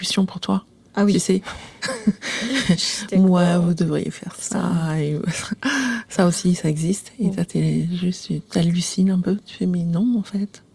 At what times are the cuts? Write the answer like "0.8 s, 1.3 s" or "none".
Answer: none